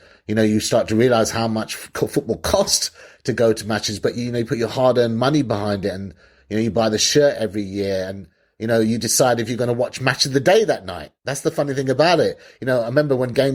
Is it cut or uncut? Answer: uncut